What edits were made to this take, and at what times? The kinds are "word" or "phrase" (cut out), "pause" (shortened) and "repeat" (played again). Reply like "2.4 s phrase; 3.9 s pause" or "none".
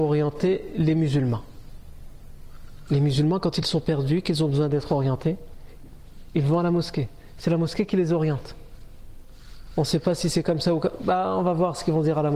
none